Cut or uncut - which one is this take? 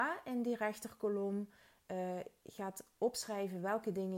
uncut